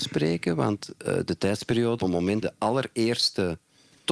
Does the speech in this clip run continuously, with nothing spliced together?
no; 2 cuts; at 2.0 s, 2.4 s

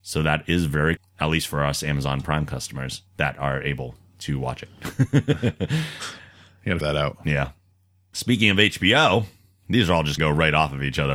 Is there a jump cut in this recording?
yes; 4 cuts; at 1.0 s, 3.1 s, 6.8 s, 10.2 s

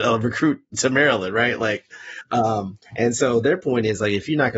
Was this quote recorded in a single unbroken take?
no; 1 cut; at 2.9 s

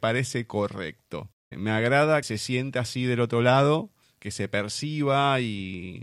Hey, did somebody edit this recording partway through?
yes; 3 cuts; at 1.4 s, 2.2 s, 4.0 s

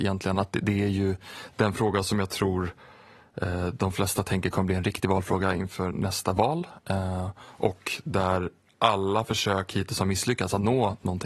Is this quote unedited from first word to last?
yes; 0 cuts

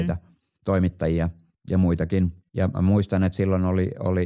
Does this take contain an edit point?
no; 0 cuts

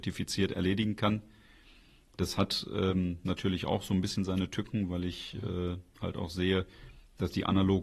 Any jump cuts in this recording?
no; 0 cuts

